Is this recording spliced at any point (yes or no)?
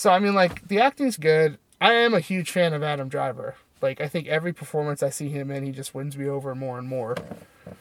yes